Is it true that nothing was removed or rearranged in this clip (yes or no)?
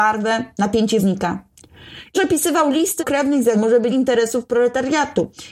no